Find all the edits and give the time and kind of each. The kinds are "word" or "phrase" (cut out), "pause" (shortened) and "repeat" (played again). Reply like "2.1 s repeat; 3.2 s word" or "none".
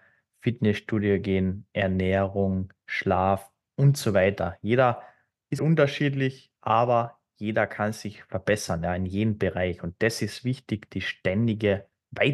5.6 s word